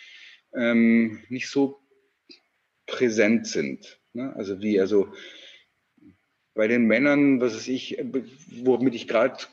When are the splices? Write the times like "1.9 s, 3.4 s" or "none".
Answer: none